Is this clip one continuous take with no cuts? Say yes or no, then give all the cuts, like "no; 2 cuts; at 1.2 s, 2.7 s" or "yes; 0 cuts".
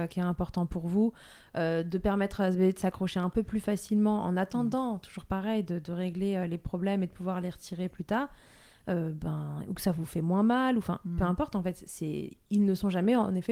yes; 0 cuts